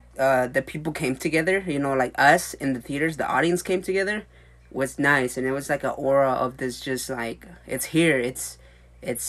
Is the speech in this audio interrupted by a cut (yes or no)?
no